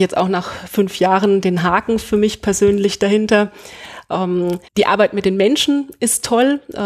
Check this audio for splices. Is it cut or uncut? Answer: cut